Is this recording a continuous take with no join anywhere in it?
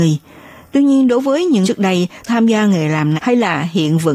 no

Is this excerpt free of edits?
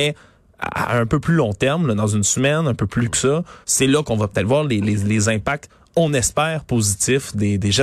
no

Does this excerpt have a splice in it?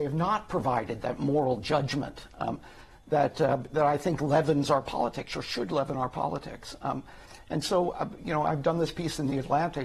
no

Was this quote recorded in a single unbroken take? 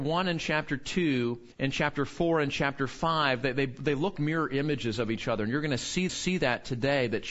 no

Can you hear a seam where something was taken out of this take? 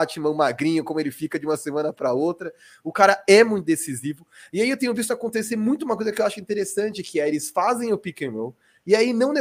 no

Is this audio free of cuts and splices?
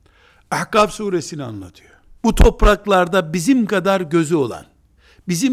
no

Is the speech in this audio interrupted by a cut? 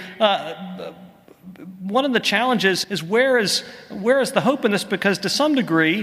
yes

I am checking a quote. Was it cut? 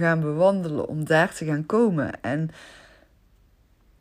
no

